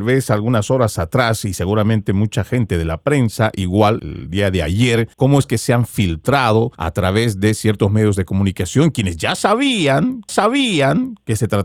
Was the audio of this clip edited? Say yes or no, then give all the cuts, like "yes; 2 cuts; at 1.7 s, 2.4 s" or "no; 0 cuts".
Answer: yes; 4 cuts; at 4.0 s, 5.1 s, 6.7 s, 10.3 s